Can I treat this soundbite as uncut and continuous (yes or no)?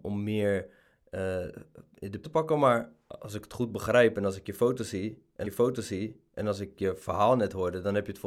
no